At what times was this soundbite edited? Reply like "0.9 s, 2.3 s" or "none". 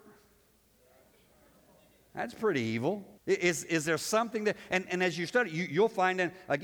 3.2 s